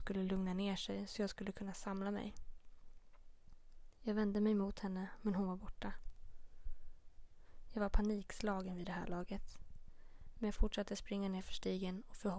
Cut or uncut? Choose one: uncut